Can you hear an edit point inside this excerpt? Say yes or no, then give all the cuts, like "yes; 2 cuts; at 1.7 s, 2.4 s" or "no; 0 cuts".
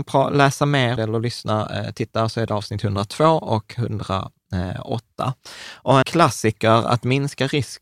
yes; 2 cuts; at 1.0 s, 6.0 s